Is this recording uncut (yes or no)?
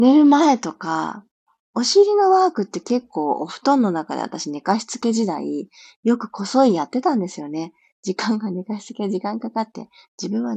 yes